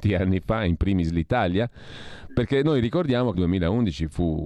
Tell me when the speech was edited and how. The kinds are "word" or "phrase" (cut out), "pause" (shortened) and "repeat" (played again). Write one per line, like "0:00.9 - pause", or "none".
0:03.3 - word

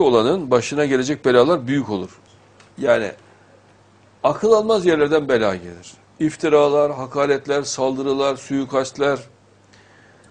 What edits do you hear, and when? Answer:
none

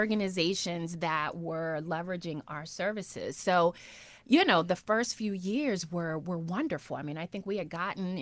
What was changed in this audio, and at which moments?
none

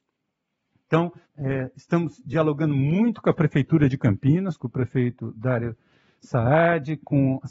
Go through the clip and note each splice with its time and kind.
0:01.2 - pause

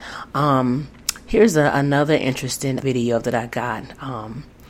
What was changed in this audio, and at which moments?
0:02.8 - word

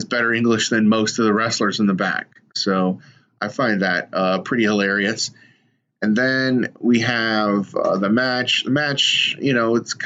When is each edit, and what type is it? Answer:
none

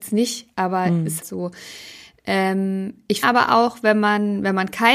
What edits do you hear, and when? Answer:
0:01.2 - word
0:03.2 - word

